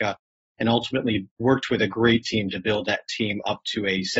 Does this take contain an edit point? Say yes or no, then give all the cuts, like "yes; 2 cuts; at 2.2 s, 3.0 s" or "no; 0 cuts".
no; 0 cuts